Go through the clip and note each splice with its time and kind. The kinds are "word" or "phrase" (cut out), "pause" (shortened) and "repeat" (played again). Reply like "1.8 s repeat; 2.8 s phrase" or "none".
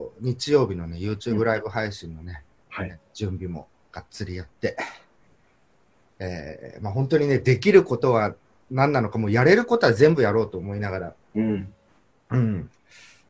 none